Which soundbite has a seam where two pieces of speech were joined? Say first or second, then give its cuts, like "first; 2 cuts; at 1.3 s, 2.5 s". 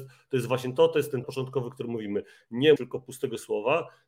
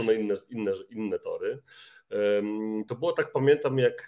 first; 2 cuts; at 1.2 s, 2.8 s